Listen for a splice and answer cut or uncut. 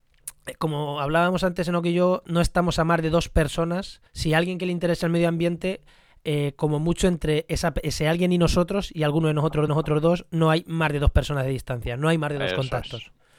cut